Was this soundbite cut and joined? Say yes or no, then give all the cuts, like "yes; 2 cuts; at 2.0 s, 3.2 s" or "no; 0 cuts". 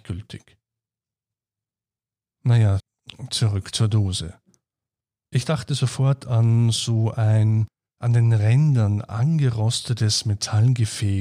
no; 0 cuts